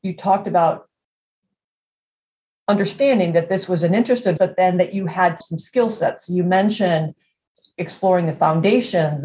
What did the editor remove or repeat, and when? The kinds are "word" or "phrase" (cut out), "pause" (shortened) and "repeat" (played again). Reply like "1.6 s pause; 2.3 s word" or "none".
4.4 s word; 5.4 s word